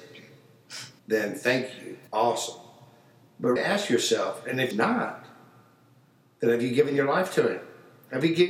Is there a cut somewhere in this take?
yes; 4 cuts; at 1.0 s, 2.1 s, 3.6 s, 4.7 s

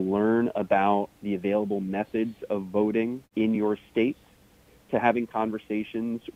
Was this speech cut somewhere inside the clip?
no; 0 cuts

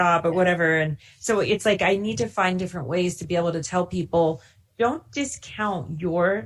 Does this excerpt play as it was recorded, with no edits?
yes; 0 cuts

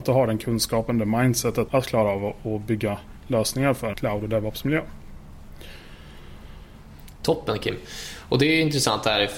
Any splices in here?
yes; 2 cuts; at 1.7 s, 3.9 s

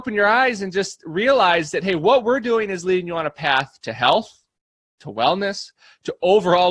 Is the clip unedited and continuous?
yes; 0 cuts

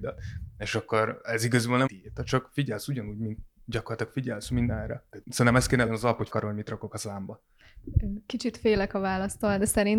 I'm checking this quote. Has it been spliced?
yes; 4 cuts; at 1.9 s, 5.2 s, 5.9 s, 6.3 s

